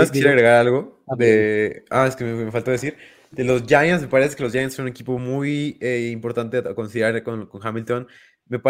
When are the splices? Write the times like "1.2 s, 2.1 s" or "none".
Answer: none